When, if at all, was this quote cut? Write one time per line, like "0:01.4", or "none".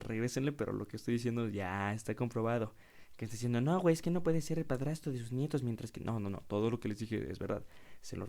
none